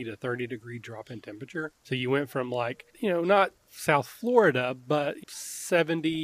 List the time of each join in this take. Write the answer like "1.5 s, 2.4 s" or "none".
1.8 s, 2.9 s, 3.6 s, 5.2 s